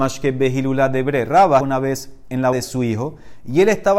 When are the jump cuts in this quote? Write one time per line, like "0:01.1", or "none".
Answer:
0:01.6
0:02.5